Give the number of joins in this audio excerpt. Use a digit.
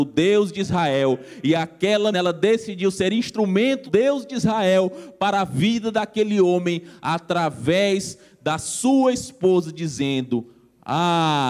2